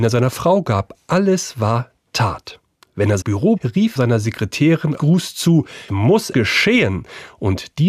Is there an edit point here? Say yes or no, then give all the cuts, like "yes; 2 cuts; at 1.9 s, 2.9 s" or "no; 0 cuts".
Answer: yes; 6 cuts; at 3.2 s, 3.6 s, 4.0 s, 5.0 s, 5.9 s, 6.3 s